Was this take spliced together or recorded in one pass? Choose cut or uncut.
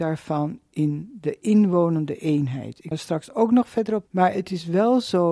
cut